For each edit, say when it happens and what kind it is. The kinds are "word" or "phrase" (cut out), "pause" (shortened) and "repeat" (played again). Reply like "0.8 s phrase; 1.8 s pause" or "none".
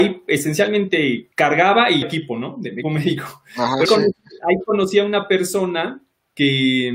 1.3 s pause; 2.0 s word; 2.8 s word; 3.8 s word